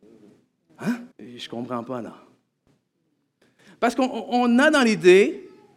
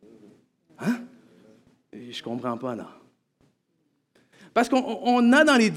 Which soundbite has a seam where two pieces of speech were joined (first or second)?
first